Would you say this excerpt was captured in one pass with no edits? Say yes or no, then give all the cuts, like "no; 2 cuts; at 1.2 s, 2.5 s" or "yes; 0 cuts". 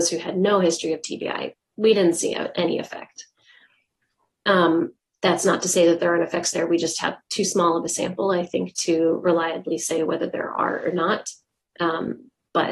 yes; 0 cuts